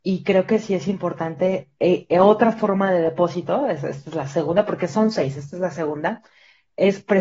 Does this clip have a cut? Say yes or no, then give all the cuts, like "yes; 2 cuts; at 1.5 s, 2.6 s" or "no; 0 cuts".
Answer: no; 0 cuts